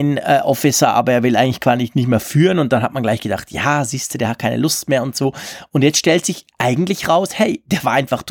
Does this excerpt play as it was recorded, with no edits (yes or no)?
yes